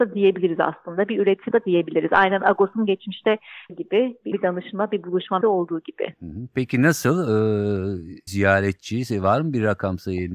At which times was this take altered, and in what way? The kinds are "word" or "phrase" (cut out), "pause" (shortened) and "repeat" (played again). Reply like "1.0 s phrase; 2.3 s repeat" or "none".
1.5 s word; 3.7 s word; 4.3 s word; 5.4 s word; 8.3 s word